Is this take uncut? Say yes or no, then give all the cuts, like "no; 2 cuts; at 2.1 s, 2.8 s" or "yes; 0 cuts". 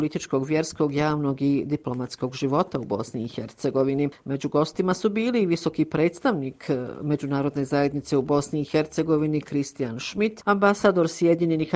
yes; 0 cuts